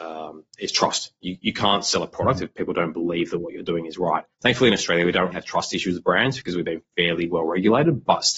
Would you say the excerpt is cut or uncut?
cut